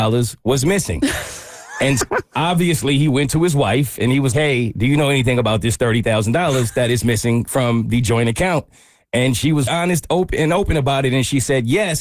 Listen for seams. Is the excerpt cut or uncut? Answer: cut